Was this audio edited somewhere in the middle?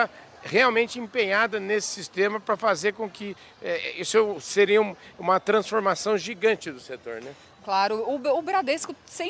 no; 0 cuts

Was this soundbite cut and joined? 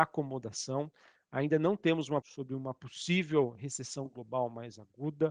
yes; 1 cut; at 2.2 s

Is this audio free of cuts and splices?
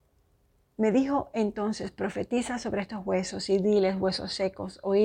yes; 0 cuts

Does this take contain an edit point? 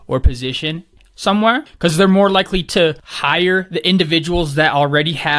no; 0 cuts

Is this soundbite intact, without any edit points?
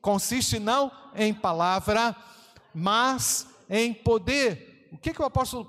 yes; 0 cuts

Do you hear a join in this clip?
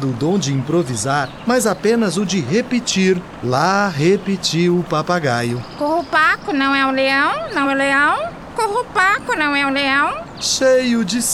yes; 1 cut; at 7.6 s

